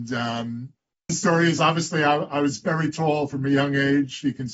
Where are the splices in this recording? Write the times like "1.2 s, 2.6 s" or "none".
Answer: 1.1 s